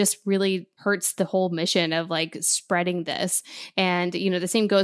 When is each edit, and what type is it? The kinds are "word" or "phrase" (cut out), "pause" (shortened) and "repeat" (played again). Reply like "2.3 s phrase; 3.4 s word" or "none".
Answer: none